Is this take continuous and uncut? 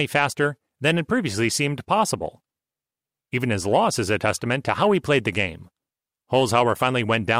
yes; 0 cuts

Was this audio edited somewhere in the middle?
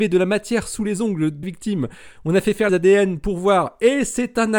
yes; 2 cuts; at 1.4 s, 2.7 s

